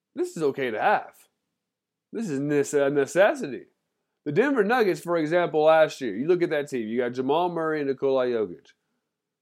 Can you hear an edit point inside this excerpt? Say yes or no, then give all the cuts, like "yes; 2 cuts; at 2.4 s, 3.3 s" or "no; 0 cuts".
no; 0 cuts